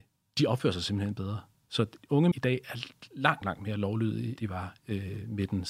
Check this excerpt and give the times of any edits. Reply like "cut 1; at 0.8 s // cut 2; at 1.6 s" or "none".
cut 1; at 2.0 s // cut 2; at 2.3 s // cut 3; at 3.4 s // cut 4; at 4.4 s // cut 5; at 4.8 s